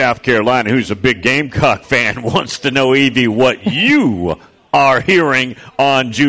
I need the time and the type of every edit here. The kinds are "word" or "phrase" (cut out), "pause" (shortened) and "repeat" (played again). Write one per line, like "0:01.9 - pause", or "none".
none